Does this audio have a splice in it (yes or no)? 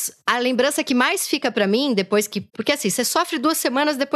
yes